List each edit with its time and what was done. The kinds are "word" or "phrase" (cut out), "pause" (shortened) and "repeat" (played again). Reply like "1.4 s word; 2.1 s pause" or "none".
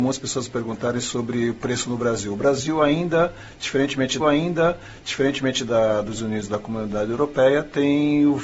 4.2 s repeat; 6.1 s word